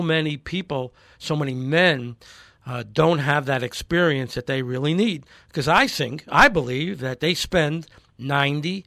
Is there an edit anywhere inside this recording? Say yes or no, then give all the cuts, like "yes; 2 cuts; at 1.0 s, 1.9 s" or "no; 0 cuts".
no; 0 cuts